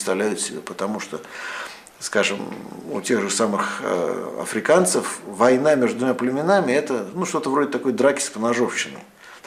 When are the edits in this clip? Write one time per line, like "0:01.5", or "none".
none